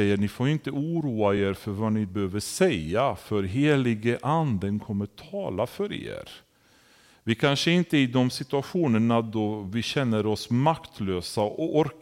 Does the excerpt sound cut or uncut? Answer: uncut